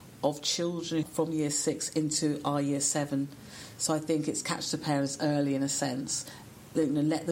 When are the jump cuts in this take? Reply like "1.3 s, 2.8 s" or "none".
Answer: 1.0 s